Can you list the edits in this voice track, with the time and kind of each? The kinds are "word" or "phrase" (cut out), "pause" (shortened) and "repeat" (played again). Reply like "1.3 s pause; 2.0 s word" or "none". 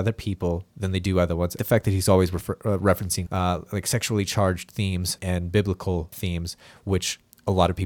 1.6 s phrase; 3.3 s word; 5.2 s word; 6.1 s word